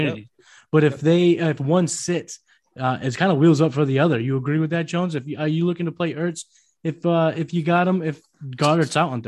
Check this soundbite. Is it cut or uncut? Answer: uncut